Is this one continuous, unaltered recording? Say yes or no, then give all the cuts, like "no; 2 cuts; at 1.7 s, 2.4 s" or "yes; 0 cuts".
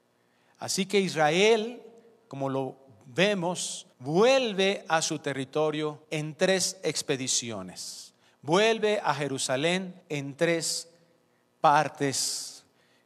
no; 3 cuts; at 3.9 s, 6.0 s, 10.0 s